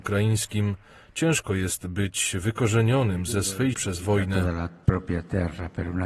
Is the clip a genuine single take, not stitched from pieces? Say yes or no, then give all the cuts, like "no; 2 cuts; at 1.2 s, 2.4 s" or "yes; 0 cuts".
no; 1 cut; at 3.7 s